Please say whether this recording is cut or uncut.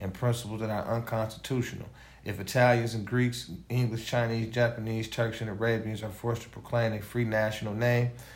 uncut